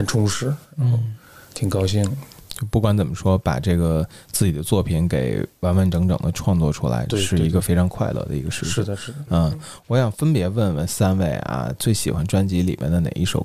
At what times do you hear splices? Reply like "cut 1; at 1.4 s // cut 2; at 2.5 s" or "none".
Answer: cut 1; at 2.4 s

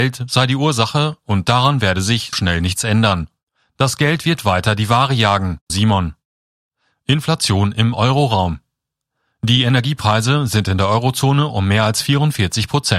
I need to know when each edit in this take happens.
cut 1; at 2.3 s // cut 2; at 5.7 s

